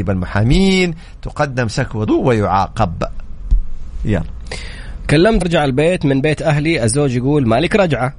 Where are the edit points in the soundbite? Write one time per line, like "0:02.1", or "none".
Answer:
0:02.1
0:05.4